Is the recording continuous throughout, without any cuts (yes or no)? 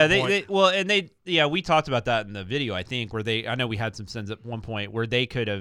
yes